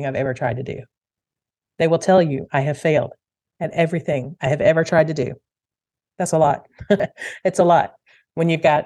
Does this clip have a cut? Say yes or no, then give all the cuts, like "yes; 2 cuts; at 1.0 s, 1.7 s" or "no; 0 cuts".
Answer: no; 0 cuts